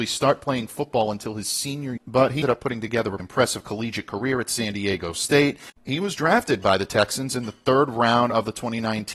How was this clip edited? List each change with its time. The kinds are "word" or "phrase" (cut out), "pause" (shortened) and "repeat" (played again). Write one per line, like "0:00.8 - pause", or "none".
0:02.0 - word
0:02.4 - word
0:03.2 - word